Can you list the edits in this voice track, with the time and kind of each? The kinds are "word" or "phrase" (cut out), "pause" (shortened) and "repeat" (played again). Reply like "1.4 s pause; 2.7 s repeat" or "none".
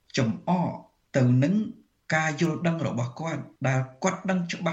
3.6 s pause